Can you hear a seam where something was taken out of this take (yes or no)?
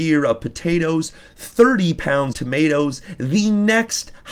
yes